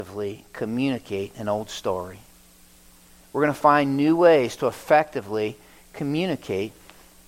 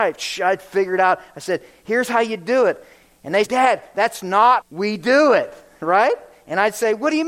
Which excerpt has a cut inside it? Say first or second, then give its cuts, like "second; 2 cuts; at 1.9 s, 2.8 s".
second; 2 cuts; at 3.4 s, 4.6 s